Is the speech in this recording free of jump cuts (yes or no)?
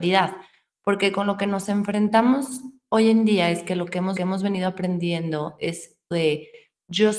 no